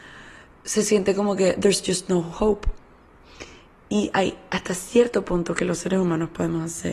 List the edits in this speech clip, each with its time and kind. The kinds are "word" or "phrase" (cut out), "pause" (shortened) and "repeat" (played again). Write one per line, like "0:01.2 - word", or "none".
none